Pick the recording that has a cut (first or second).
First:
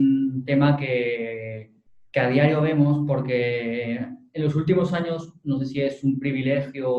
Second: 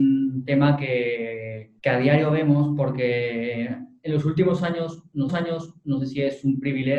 second